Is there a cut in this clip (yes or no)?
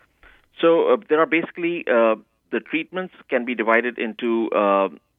no